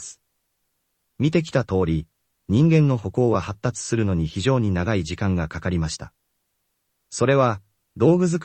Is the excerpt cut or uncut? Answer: uncut